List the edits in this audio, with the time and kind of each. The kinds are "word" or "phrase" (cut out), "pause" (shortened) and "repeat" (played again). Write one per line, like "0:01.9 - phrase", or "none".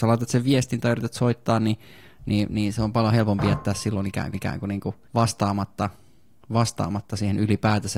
0:04.3 - repeat
0:05.0 - pause